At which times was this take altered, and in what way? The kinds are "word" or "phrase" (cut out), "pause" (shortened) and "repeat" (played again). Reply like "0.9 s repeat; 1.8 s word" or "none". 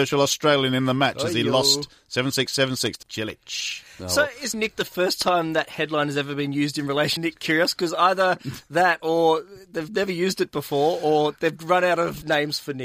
3.0 s phrase; 4.5 s word; 7.2 s word